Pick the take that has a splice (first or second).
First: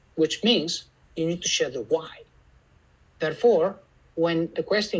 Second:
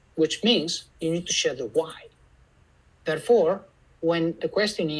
second